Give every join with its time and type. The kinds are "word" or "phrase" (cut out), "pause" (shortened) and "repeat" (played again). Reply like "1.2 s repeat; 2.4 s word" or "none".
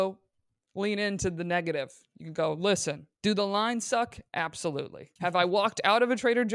3.1 s pause; 5.2 s pause

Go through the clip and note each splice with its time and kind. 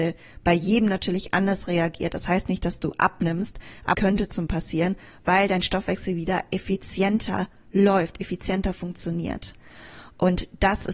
3.9 s word; 4.5 s word

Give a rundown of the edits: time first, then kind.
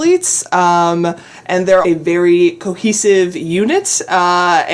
1.8 s word

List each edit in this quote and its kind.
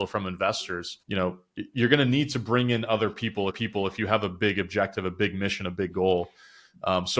1.0 s pause; 3.5 s repeat

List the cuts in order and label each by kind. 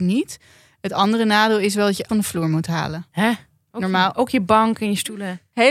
2.1 s word

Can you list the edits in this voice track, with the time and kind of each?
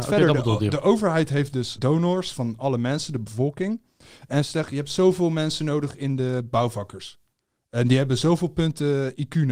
1.8 s word

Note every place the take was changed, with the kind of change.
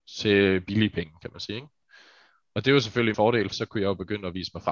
3.1 s word; 3.5 s word

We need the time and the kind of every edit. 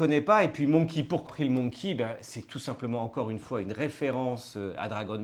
1.3 s word

